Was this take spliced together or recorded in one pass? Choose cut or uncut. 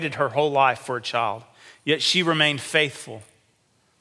uncut